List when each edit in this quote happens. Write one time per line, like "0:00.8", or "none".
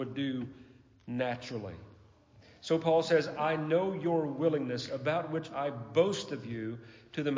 none